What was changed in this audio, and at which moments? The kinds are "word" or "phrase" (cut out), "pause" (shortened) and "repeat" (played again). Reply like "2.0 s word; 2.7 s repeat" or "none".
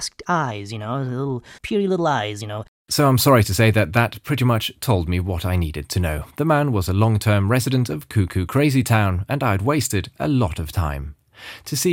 1.6 s pause; 6.3 s pause